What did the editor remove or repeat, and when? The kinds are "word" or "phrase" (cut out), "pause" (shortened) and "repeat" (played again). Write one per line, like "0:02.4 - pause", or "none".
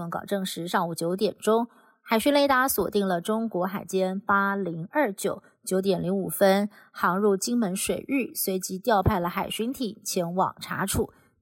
none